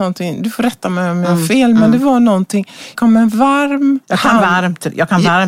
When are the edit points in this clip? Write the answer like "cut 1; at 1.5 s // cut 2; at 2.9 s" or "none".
cut 1; at 2.9 s // cut 2; at 4.0 s